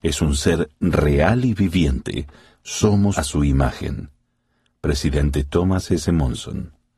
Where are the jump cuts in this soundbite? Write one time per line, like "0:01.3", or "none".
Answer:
0:03.1